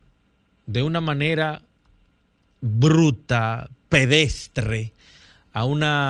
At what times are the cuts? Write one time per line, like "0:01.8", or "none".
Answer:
none